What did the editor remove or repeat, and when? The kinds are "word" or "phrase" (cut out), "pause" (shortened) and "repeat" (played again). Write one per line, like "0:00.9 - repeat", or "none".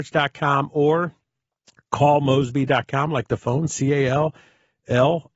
none

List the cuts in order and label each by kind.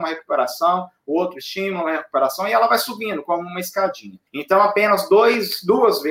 0:04.3 - pause

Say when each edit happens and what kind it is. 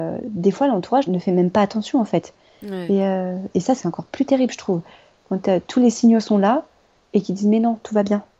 0:01.1 - word
0:03.8 - word

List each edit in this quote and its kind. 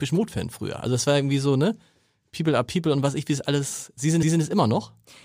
0:04.2 - repeat

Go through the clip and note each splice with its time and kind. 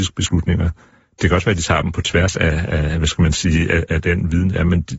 none

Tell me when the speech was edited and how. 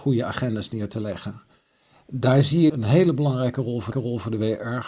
0:01.8 - pause
0:02.7 - word
0:03.9 - repeat

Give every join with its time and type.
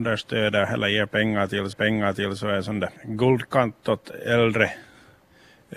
0:01.7 - repeat
0:03.0 - pause

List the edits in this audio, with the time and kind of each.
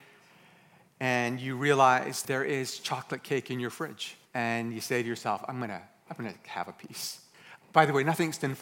0:02.2 - word
0:04.2 - pause

